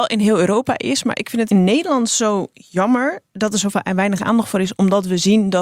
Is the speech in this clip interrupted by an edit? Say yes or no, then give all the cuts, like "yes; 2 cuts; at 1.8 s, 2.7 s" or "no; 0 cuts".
yes; 1 cut; at 1.5 s